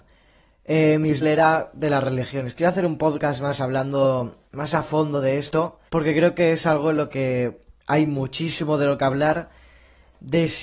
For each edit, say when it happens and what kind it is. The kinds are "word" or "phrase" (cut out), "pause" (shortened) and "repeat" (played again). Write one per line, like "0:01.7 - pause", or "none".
0:01.2 - word
0:05.9 - pause

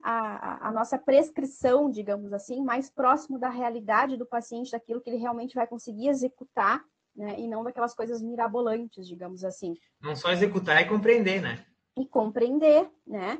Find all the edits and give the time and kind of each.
none

